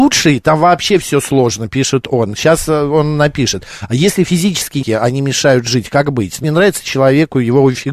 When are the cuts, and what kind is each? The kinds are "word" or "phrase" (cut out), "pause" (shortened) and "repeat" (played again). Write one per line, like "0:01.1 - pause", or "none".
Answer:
0:04.8 - word
0:06.4 - phrase